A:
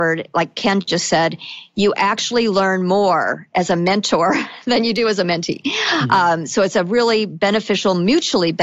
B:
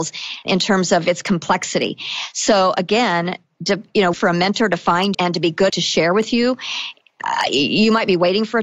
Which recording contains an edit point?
B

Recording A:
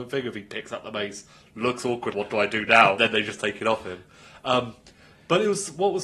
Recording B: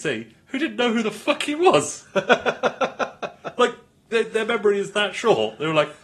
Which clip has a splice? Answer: A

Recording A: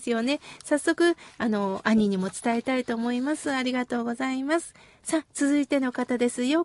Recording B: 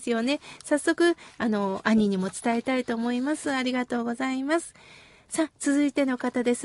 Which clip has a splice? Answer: A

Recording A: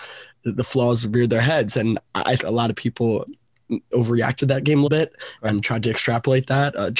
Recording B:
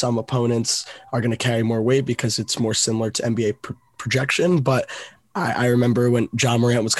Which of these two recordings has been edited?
A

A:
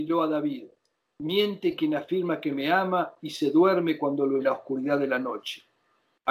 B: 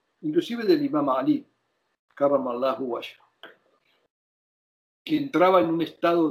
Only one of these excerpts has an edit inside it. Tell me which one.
A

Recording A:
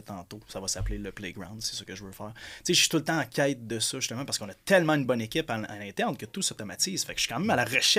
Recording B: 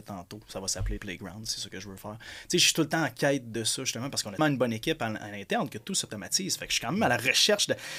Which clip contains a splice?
B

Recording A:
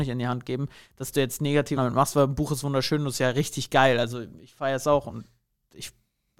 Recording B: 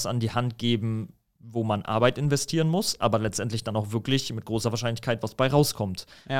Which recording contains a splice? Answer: A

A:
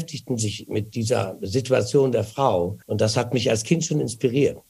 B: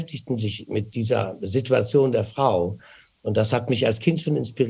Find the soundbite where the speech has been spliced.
A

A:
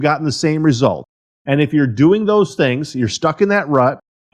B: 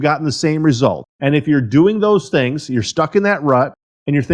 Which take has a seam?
B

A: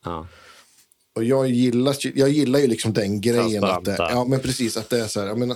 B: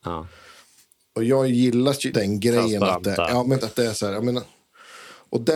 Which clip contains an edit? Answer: B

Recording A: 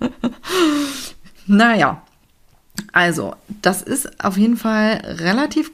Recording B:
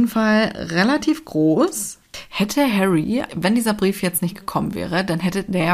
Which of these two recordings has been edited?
B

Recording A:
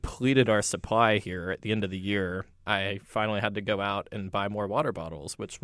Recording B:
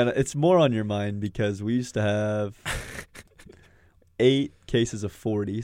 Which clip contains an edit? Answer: A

